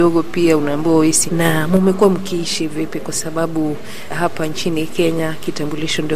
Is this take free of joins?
no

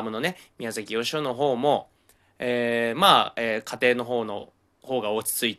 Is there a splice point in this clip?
no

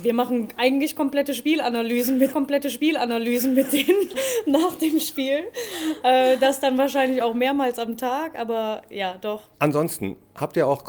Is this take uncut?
no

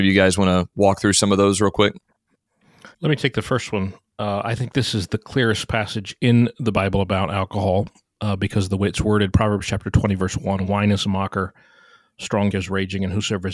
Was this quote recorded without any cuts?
no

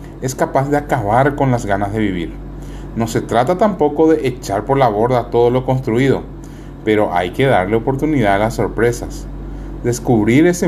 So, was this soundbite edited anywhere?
no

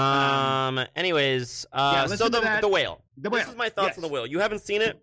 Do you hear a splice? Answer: yes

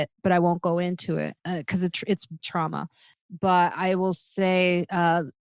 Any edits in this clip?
yes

